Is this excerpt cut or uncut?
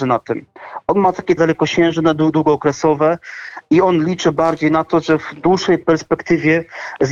cut